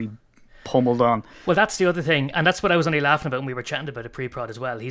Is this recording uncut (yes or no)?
yes